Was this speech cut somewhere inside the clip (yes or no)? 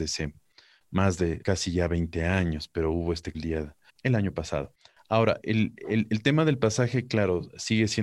yes